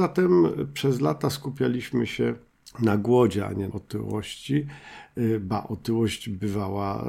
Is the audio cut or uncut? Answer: cut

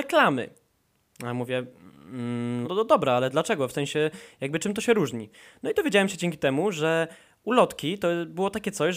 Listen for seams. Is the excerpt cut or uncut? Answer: cut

